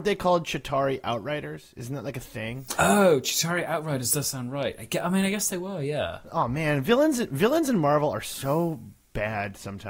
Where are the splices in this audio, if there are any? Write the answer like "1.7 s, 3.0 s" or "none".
none